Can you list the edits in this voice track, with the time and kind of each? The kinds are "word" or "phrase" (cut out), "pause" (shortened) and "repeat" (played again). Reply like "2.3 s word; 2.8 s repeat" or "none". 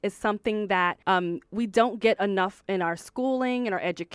1.0 s pause